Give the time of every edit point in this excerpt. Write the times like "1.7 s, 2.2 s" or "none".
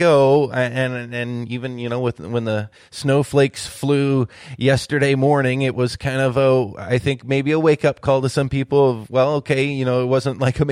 none